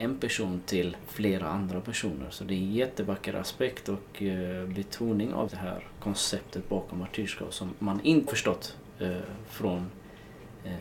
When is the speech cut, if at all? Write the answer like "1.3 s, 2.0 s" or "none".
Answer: 1.0 s, 5.5 s, 8.3 s